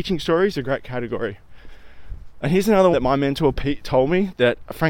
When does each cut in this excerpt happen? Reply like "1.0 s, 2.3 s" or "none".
2.9 s

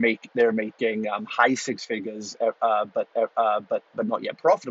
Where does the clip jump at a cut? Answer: 3.1 s

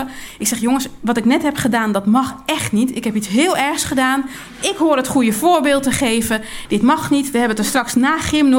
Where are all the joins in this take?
none

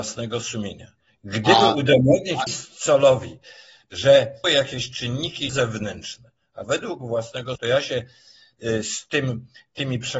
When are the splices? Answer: 1.0 s, 2.5 s, 4.4 s, 5.5 s, 6.6 s, 7.6 s

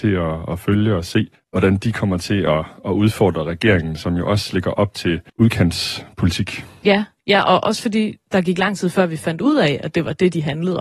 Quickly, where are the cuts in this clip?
1.3 s, 5.3 s

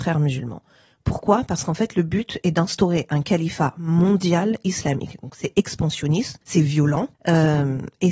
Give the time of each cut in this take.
6.4 s, 7.1 s

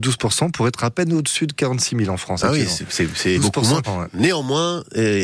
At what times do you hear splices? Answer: 3.4 s, 3.8 s

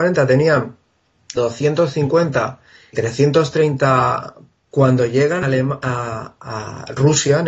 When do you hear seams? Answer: 1.4 s, 2.9 s, 4.7 s, 5.4 s

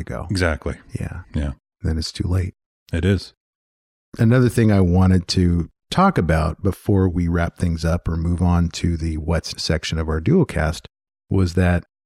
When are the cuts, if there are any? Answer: 9.5 s

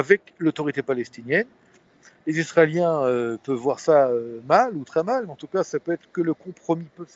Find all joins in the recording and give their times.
none

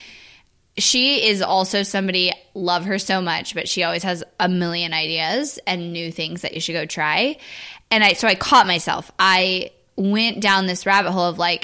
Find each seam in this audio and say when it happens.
none

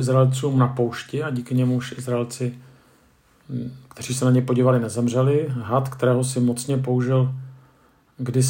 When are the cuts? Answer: none

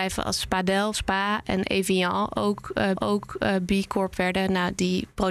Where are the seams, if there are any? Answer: 0.9 s, 2.9 s

